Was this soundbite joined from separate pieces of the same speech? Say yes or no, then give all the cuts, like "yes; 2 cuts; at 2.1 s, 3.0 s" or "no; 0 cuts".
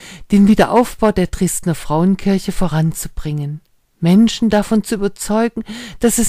no; 0 cuts